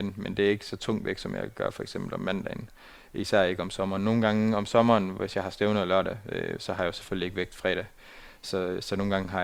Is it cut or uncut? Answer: uncut